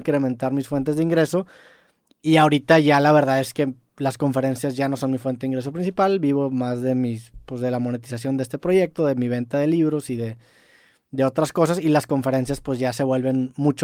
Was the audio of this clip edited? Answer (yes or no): no